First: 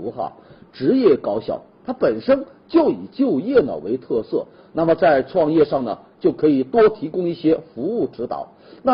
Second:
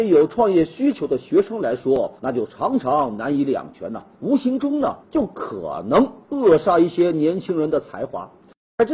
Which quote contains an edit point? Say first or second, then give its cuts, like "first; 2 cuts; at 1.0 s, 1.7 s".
second; 3 cuts; at 2.2 s, 4.1 s, 5.0 s